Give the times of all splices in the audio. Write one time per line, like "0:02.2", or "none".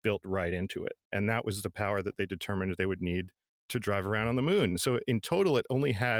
none